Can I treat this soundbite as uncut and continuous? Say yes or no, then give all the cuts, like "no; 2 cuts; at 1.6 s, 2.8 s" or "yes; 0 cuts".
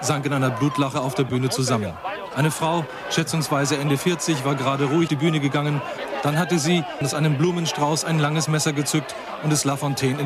no; 1 cut; at 5.1 s